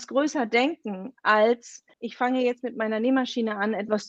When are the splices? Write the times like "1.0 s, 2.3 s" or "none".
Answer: 1.9 s